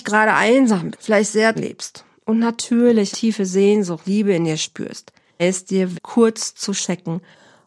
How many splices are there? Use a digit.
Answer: 6